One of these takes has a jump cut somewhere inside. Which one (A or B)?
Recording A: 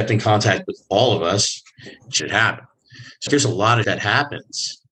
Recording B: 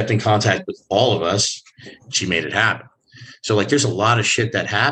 A